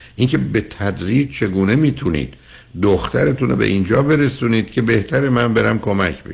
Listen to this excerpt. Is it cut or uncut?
uncut